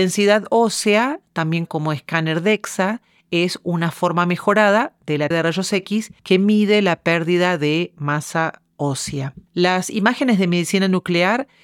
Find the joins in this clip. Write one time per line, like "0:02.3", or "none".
0:01.7
0:05.3
0:06.2
0:09.5